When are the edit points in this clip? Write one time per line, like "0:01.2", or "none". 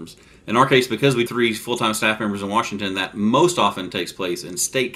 0:01.3